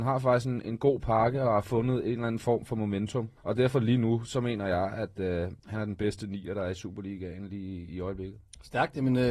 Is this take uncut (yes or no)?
no